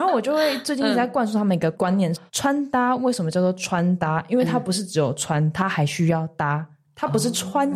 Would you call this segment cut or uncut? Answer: cut